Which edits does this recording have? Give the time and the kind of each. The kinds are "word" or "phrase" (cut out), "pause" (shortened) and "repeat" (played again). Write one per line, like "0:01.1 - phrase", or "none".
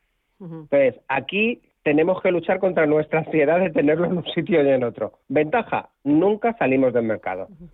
0:01.7 - pause
0:05.2 - pause